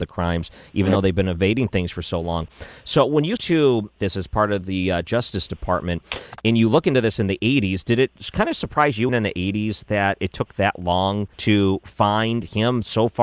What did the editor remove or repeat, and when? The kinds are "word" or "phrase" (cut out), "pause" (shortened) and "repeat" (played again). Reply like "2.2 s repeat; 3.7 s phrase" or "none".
3.4 s word; 4.0 s phrase; 9.1 s word; 11.3 s pause